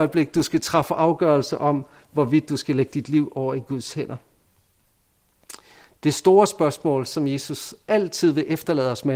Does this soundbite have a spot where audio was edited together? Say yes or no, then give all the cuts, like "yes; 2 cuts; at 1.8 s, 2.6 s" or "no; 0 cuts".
no; 0 cuts